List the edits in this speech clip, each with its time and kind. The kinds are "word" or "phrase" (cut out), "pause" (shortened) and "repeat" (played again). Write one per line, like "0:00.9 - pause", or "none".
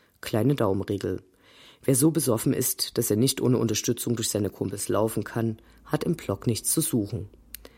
none

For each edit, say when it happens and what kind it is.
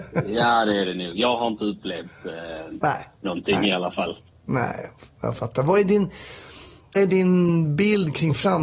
0:03.1 - pause
0:04.3 - pause
0:07.0 - word

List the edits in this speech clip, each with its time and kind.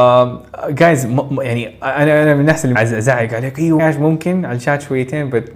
0:02.7 - phrase
0:03.8 - phrase

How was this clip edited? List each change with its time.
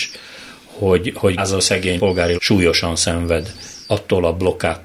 0:01.4 - word
0:02.0 - phrase
0:02.4 - phrase

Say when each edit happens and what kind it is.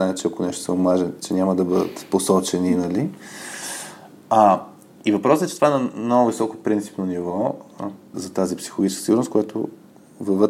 0:08.1 - word

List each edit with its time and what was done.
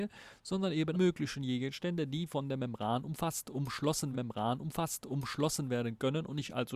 0:00.9 - phrase
0:04.1 - repeat

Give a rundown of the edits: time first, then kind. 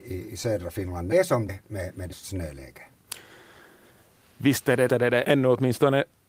0:01.1 - word
0:01.5 - word
0:02.1 - word
0:04.9 - word
0:05.2 - word

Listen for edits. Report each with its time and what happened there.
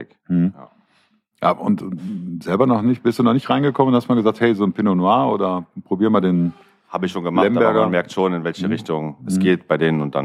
none

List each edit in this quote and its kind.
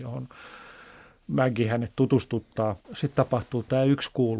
0:02.8 - pause

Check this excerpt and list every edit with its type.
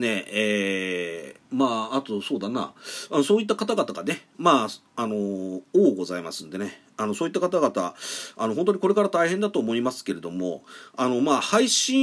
0:01.4 - pause

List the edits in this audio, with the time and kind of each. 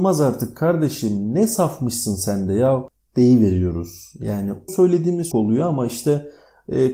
0:04.7 - word
0:05.3 - word

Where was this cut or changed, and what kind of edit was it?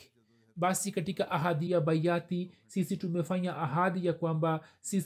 0:01.7 - word

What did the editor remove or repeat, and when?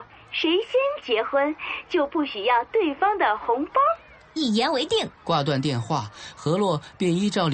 0:05.1 - pause

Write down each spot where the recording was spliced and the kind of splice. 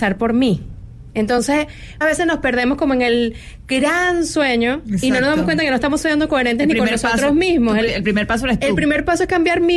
0:02.0 - word

